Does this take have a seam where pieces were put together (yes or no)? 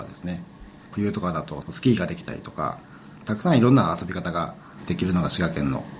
yes